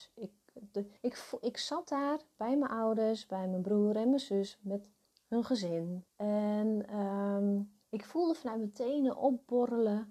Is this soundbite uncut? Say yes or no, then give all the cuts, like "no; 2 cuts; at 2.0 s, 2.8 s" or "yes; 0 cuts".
no; 4 cuts; at 1.0 s, 5.0 s, 6.1 s, 7.8 s